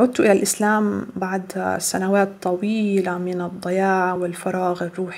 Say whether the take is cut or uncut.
uncut